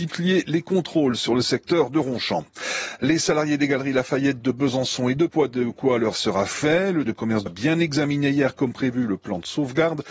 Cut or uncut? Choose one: cut